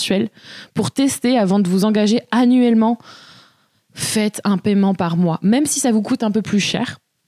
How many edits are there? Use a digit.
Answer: 0